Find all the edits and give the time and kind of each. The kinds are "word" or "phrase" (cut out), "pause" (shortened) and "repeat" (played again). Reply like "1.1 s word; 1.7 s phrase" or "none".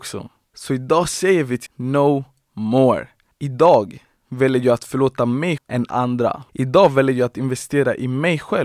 1.7 s word; 5.6 s word; 5.9 s word